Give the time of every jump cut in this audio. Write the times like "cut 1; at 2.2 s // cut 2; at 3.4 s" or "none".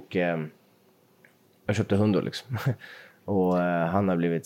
none